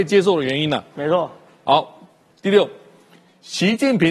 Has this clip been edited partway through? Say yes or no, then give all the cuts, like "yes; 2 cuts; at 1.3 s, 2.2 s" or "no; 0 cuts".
no; 0 cuts